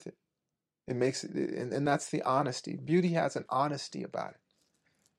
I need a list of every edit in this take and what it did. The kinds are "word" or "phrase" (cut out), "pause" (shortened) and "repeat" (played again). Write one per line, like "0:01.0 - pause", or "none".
none